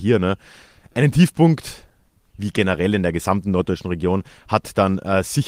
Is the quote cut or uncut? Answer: uncut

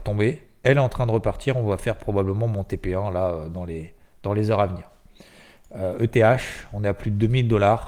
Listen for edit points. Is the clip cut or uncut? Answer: uncut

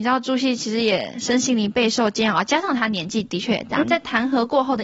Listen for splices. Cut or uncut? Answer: cut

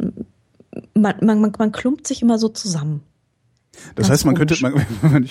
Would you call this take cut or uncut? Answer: uncut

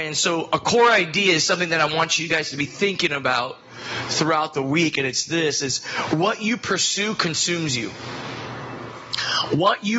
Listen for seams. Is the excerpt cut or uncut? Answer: uncut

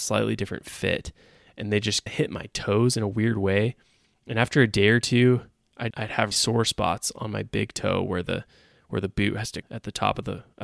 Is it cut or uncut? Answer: cut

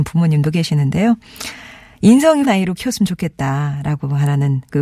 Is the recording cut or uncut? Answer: cut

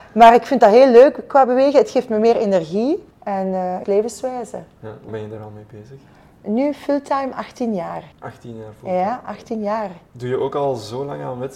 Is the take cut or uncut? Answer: cut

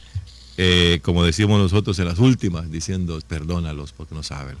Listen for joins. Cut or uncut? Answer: cut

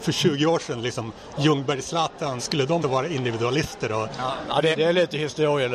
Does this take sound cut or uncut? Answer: cut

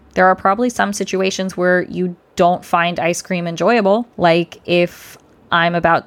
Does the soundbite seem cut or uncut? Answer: cut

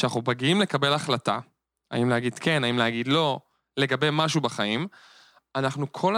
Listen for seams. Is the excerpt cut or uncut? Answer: uncut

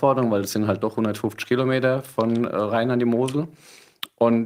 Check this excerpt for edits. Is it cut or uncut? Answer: uncut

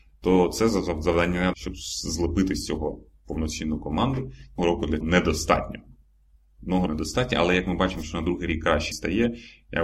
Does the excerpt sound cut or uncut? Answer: cut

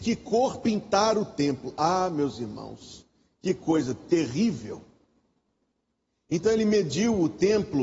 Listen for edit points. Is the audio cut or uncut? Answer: uncut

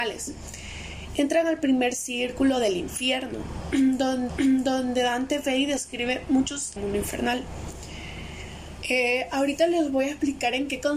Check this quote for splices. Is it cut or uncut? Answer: cut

